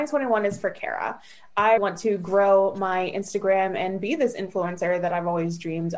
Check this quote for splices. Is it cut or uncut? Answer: cut